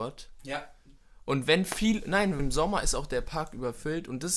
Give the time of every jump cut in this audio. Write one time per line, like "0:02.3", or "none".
0:02.4